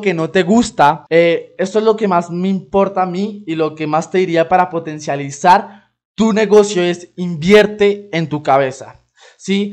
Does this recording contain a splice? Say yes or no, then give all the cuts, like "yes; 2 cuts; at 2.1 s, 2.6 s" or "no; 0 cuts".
yes; 1 cut; at 1.1 s